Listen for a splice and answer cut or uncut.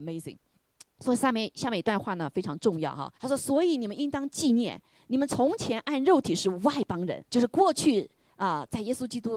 cut